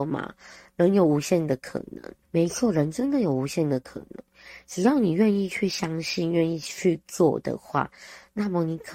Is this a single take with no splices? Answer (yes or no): no